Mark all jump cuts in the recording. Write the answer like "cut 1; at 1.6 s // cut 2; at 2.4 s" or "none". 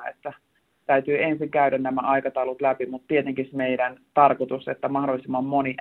cut 1; at 3.5 s